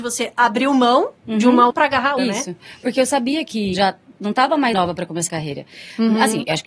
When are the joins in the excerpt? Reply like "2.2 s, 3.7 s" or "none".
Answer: 1.7 s, 2.2 s, 3.7 s, 4.7 s, 5.3 s